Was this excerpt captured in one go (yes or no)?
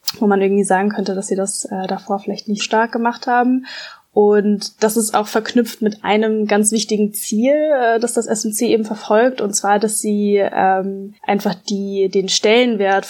no